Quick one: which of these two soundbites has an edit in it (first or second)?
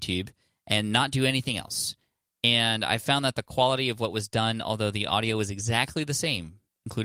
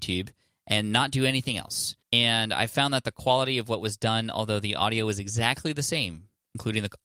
second